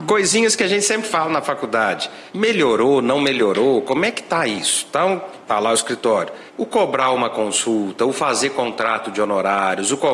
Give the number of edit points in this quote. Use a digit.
3